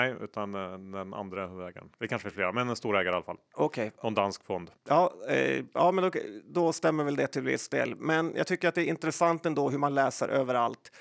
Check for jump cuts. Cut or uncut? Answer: cut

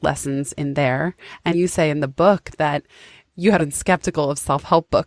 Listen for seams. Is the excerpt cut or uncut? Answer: cut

